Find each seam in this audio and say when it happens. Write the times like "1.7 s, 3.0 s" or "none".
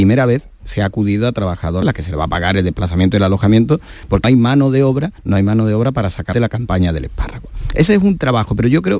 1.8 s, 4.2 s, 5.2 s, 6.3 s